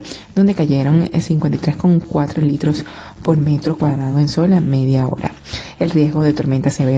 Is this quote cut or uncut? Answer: uncut